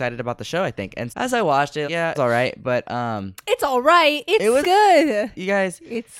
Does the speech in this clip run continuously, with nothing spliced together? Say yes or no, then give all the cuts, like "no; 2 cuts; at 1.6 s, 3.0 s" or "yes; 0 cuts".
no; 4 cuts; at 1.1 s, 1.8 s, 2.1 s, 4.6 s